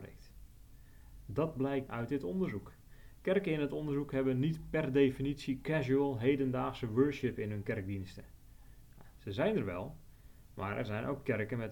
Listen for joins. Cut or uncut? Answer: cut